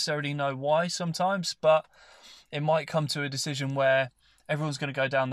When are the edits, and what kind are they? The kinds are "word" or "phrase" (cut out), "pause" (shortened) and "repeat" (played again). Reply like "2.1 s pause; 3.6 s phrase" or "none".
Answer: none